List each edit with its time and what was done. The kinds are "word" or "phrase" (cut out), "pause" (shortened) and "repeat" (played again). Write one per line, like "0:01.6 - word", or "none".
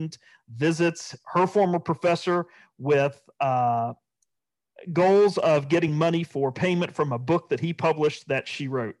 none